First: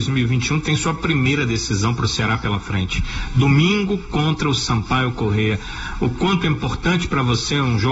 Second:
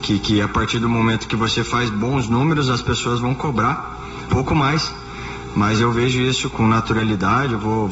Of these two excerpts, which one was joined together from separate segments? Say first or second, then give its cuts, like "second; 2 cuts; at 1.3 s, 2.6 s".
second; 2 cuts; at 4.3 s, 6.5 s